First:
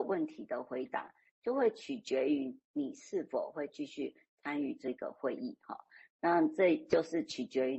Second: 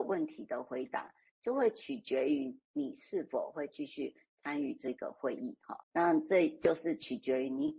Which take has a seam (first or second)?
second